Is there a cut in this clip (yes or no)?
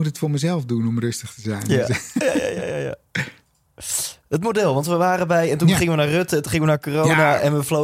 no